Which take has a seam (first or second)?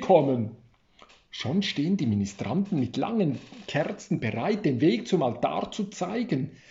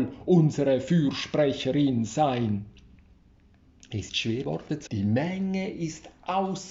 second